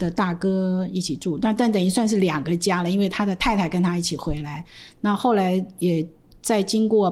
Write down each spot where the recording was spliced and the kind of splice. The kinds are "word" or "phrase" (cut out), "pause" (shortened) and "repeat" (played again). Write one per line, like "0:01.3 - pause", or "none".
none